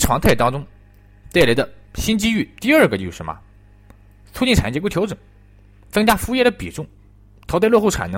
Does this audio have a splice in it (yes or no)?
no